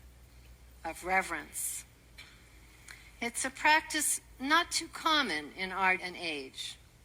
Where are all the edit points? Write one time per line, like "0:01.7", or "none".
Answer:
0:06.0